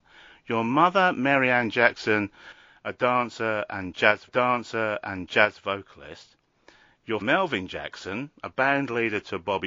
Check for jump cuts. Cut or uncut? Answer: cut